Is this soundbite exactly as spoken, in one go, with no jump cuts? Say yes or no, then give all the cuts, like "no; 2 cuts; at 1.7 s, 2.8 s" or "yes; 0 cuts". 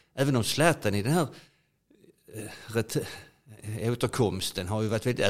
yes; 0 cuts